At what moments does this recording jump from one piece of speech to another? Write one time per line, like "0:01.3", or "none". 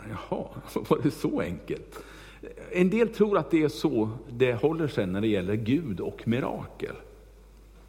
none